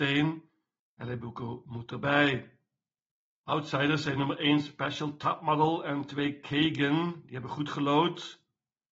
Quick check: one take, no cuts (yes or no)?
yes